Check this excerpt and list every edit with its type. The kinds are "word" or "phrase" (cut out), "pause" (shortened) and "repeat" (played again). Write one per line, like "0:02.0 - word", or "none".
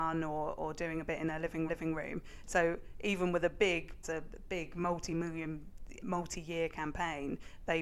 0:01.7 - repeat
0:04.0 - phrase
0:06.0 - word